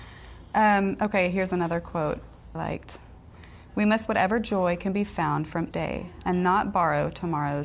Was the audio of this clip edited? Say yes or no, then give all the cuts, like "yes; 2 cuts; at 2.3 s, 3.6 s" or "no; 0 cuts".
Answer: yes; 3 cuts; at 2.5 s, 4.1 s, 5.7 s